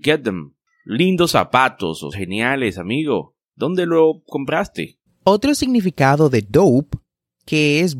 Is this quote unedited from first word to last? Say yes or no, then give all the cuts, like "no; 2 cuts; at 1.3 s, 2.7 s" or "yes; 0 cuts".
no; 1 cut; at 2.1 s